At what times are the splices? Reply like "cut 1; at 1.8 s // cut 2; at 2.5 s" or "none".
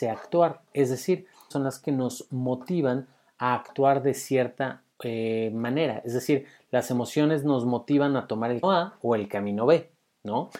cut 1; at 1.5 s // cut 2; at 4.9 s // cut 3; at 8.6 s